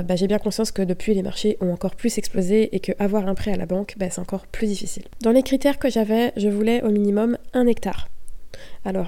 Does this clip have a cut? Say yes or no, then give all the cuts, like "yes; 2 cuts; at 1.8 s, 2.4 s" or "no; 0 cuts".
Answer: no; 0 cuts